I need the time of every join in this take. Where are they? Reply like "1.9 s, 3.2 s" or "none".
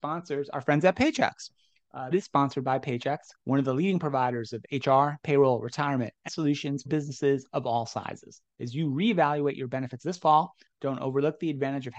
2.1 s, 3.4 s, 6.3 s, 6.9 s, 8.5 s, 10.0 s

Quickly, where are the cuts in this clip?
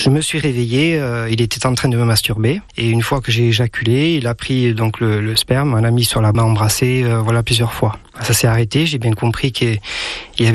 2.7 s, 6.3 s

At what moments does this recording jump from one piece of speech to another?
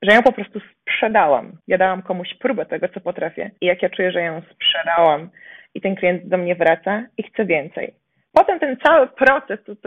1.6 s, 3.6 s

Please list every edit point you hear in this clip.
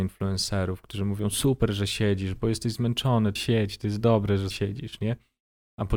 3.4 s, 4.5 s

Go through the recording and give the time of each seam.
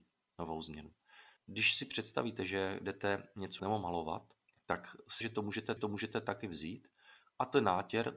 1.4 s, 3.6 s, 4.5 s, 5.2 s, 5.8 s

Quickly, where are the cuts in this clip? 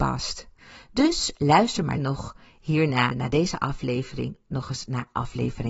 2.0 s, 3.1 s

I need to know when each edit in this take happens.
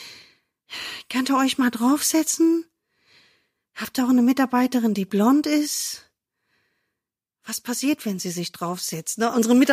none

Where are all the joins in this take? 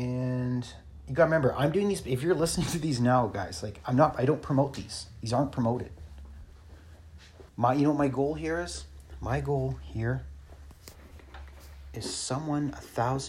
7.5 s

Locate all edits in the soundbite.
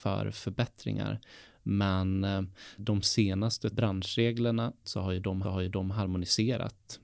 2.8 s, 3.7 s, 4.8 s, 5.4 s

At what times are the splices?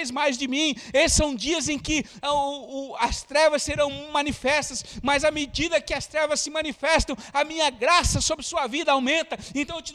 none

